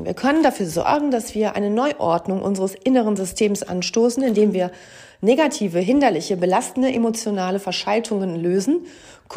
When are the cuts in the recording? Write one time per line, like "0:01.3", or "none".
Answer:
none